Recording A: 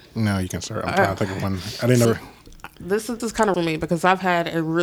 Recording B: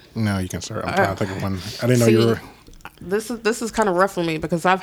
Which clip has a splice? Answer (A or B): A